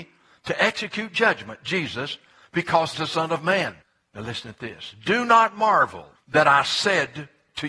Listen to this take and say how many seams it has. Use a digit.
3